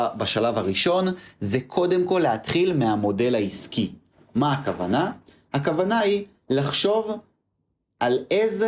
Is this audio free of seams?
yes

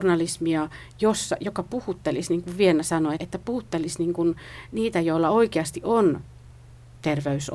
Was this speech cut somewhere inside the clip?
yes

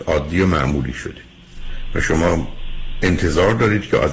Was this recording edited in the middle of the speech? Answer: no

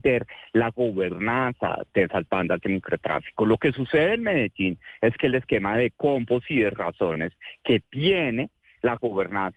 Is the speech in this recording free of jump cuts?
yes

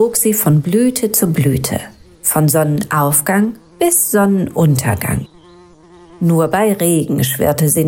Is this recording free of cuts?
yes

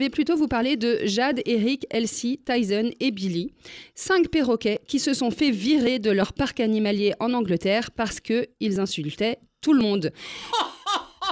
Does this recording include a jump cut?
no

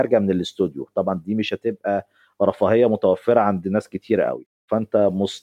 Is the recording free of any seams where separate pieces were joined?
yes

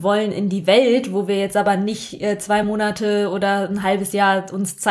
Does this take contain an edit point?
no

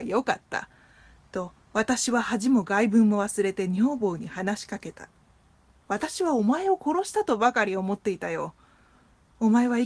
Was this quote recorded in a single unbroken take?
no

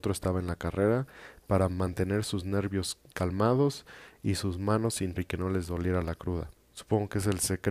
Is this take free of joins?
no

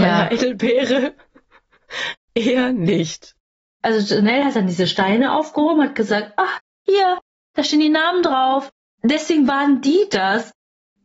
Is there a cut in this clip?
no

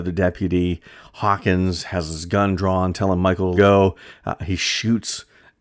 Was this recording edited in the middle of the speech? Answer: yes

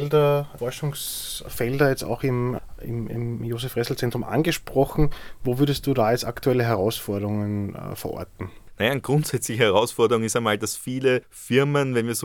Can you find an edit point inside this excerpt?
no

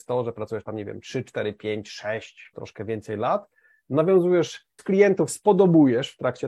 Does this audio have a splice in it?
yes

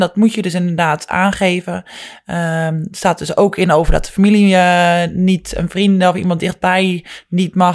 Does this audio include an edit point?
no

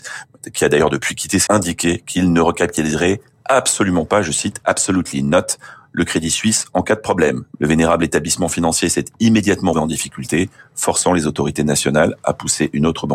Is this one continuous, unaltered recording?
no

